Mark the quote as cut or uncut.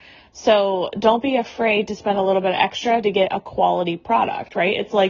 uncut